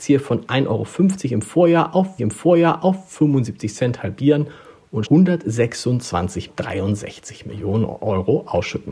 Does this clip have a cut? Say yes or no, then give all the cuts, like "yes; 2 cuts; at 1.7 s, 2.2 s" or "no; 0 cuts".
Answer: yes; 3 cuts; at 2.2 s, 5.1 s, 6.5 s